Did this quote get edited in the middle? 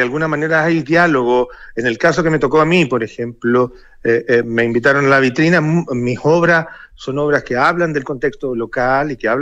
no; 0 cuts

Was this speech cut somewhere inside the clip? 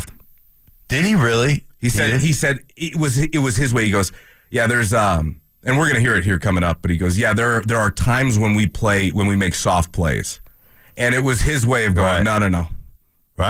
no; 0 cuts

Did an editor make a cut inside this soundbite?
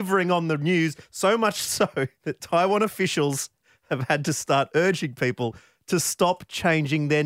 yes; 1 cut; at 2.2 s

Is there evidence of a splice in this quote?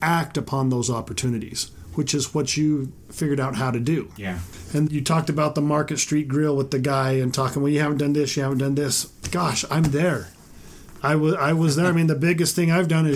yes; 1 cut; at 4.9 s

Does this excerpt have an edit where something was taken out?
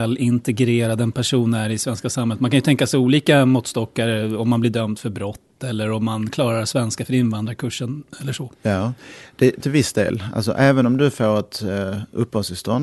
yes; 2 cuts; at 8.5 s, 9.6 s

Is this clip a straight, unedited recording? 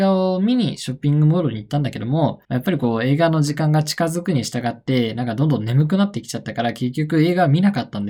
no; 1 cut; at 2.4 s

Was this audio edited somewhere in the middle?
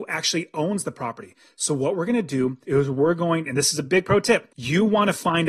yes; 1 cut; at 2.6 s

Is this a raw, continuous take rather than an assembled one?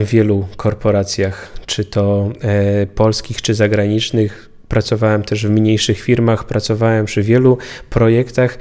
yes; 0 cuts

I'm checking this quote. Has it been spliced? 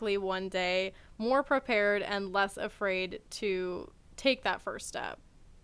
no; 0 cuts

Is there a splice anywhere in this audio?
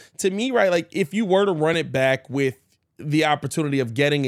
no; 0 cuts

